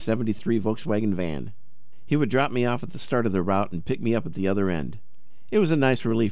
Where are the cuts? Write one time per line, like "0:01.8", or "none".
none